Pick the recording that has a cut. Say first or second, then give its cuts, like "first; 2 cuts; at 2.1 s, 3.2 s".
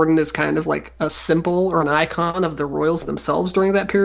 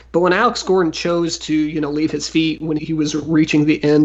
second; 1 cut; at 2.8 s